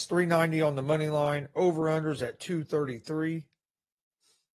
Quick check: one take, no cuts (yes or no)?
yes